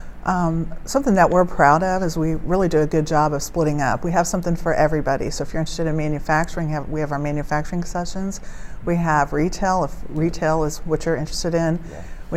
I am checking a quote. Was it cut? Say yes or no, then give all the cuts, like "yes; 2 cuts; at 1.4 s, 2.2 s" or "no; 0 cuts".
no; 0 cuts